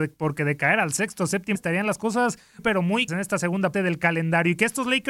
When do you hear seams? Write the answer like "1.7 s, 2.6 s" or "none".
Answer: 1.5 s, 2.6 s, 3.1 s, 3.7 s

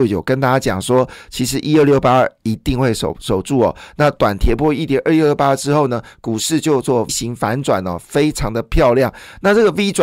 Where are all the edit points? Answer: 7.1 s

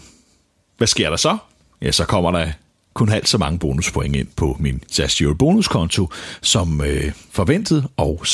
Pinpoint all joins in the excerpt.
none

